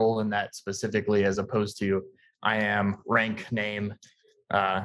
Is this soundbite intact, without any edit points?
yes; 0 cuts

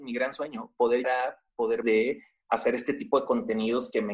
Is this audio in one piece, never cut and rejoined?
no; 2 cuts; at 1.0 s, 1.8 s

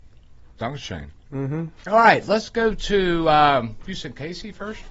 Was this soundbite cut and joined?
yes; 1 cut; at 1.8 s

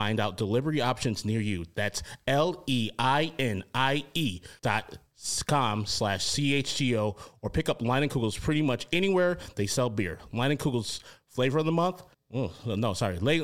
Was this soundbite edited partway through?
yes; 2 cuts; at 4.6 s, 12.1 s

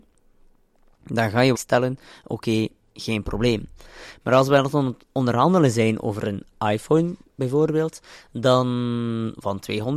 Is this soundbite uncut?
no; 1 cut; at 1.5 s

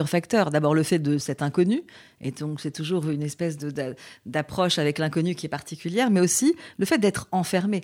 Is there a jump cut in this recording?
no; 0 cuts

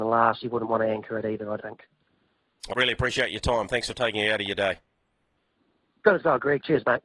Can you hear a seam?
yes; 2 cuts; at 1.6 s, 2.7 s

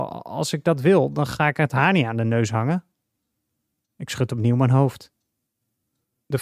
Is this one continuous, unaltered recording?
yes; 0 cuts

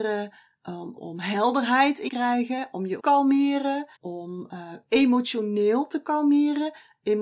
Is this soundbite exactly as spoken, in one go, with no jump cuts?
no; 4 cuts; at 1.0 s, 2.1 s, 3.0 s, 4.0 s

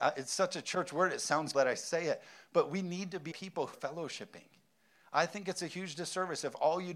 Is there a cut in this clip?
yes; 3 cuts; at 1.5 s, 3.3 s, 3.7 s

